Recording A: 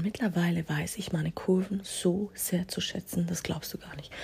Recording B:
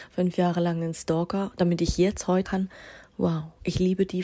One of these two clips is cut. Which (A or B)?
B